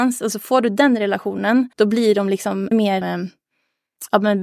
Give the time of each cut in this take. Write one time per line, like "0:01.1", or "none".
0:01.7
0:02.7
0:03.0